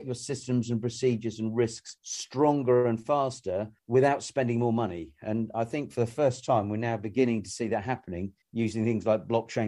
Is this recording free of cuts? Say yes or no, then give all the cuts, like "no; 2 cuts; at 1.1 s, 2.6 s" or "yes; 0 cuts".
no; 1 cut; at 8.4 s